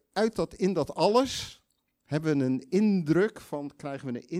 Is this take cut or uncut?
uncut